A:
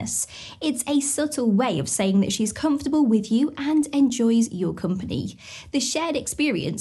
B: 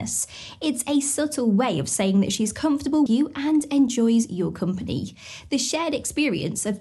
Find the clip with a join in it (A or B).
B